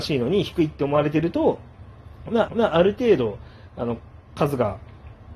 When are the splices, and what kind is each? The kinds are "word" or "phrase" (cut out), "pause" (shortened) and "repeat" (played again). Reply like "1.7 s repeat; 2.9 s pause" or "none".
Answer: 2.5 s repeat